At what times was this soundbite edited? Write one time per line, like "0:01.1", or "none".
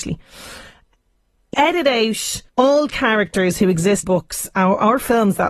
0:01.5
0:02.5
0:04.0